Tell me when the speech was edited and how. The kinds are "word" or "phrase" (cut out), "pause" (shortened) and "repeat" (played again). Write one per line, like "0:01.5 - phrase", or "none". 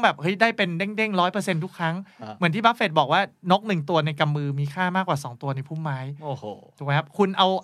none